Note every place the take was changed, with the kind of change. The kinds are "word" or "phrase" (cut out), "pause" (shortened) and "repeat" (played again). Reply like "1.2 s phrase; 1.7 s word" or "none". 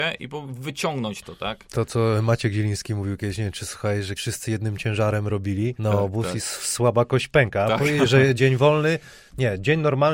1.7 s word; 4.2 s word; 5.8 s word; 8.4 s word